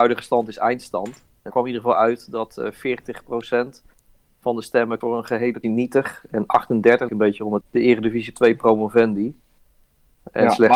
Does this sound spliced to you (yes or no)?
yes